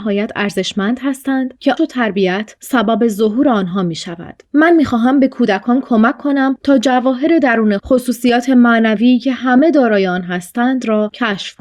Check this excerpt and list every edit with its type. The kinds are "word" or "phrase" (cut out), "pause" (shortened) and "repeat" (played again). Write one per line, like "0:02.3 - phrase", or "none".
0:01.8 - word
0:07.8 - word